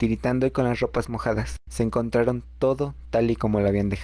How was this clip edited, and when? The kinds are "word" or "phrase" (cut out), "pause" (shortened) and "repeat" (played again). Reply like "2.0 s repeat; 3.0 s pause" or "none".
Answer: 1.6 s pause